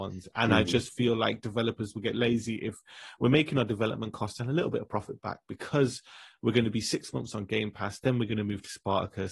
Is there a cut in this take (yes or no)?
no